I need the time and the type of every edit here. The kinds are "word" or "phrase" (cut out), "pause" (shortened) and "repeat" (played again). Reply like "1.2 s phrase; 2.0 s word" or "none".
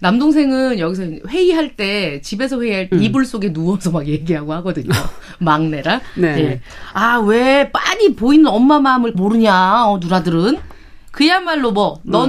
2.9 s word; 9.1 s word